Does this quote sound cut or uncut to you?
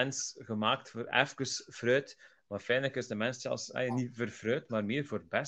uncut